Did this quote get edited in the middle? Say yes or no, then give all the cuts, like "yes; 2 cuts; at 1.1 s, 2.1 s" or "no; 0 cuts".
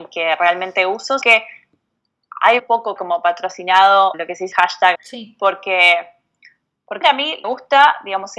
yes; 8 cuts; at 1.2 s, 2.6 s, 3.0 s, 4.1 s, 4.5 s, 4.9 s, 7.0 s, 7.4 s